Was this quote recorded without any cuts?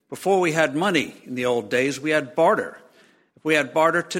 yes; 0 cuts

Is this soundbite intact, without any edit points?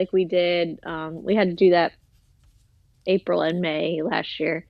yes; 0 cuts

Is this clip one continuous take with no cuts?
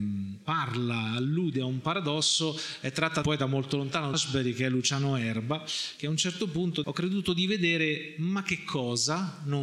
no; 3 cuts; at 3.2 s, 4.1 s, 6.8 s

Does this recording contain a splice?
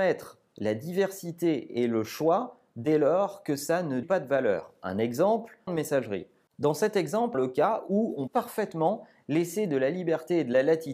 yes; 4 cuts; at 4.0 s, 5.7 s, 7.3 s, 8.3 s

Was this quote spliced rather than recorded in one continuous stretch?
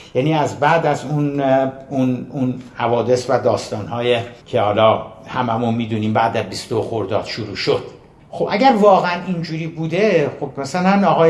yes; 2 cuts; at 4.4 s, 8.2 s

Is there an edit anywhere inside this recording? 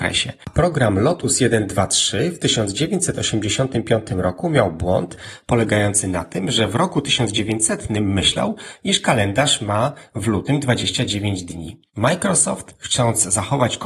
yes; 1 cut; at 11.9 s

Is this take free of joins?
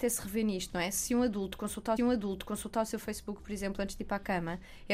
no; 1 cut; at 2.0 s

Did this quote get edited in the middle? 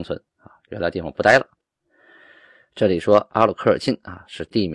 no; 0 cuts

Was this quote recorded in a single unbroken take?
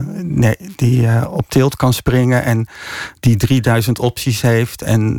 yes; 0 cuts

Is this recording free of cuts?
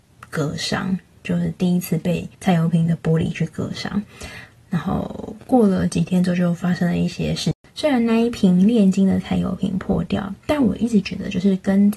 no; 1 cut; at 2.3 s

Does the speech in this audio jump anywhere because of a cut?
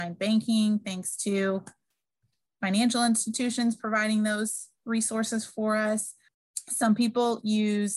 no; 0 cuts

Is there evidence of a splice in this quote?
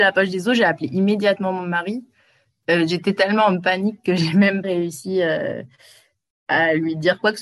yes; 1 cut; at 4.6 s

